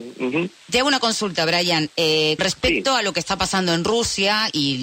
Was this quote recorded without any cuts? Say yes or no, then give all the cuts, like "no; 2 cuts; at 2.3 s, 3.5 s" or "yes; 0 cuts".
no; 1 cut; at 2.4 s